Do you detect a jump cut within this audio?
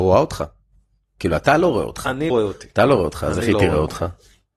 yes; 1 cut; at 2.3 s

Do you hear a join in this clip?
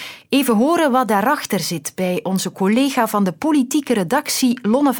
no; 0 cuts

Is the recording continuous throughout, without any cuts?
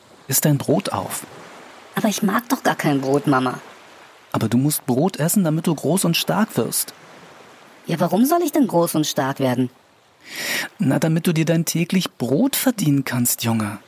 yes; 0 cuts

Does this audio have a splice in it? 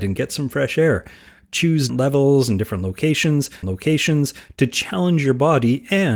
yes; 2 cuts; at 1.9 s, 3.6 s

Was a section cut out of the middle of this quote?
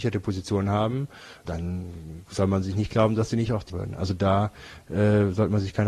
yes; 2 cuts; at 1.4 s, 3.7 s

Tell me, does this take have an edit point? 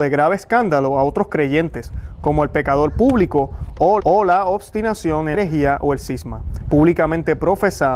yes; 2 cuts; at 4.0 s, 5.3 s

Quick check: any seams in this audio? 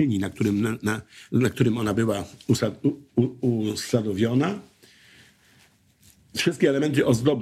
no; 0 cuts

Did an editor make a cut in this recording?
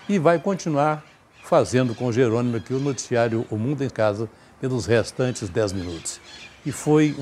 yes; 1 cut; at 3.9 s

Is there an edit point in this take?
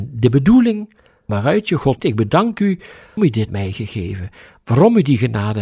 yes; 4 cuts; at 1.3 s, 2.0 s, 3.2 s, 3.5 s

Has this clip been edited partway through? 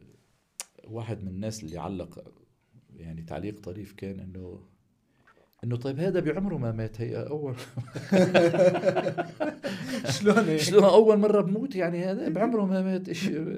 no; 0 cuts

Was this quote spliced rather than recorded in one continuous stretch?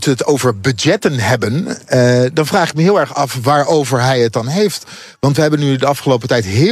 no; 0 cuts

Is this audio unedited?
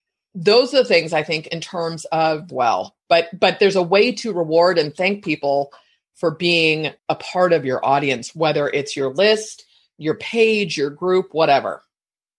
no; 2 cuts; at 2.5 s, 7.0 s

